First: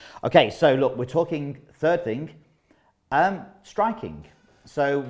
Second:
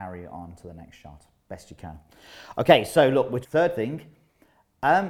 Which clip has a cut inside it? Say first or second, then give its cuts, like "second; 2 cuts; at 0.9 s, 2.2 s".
second; 1 cut; at 3.4 s